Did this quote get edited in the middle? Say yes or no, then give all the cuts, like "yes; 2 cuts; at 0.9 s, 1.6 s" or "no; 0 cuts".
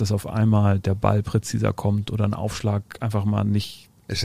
no; 0 cuts